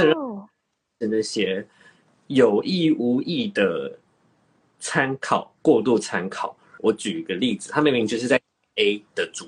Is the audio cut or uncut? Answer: uncut